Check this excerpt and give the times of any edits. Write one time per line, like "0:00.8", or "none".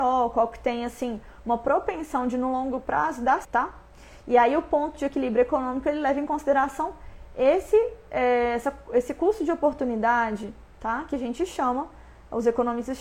0:03.4